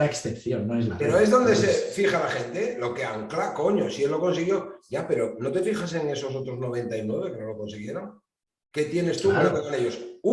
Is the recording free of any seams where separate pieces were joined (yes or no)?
yes